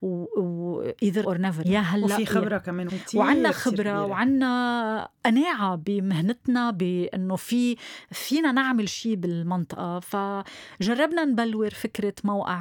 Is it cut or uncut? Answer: cut